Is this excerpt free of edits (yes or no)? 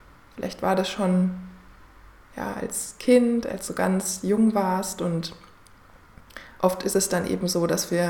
yes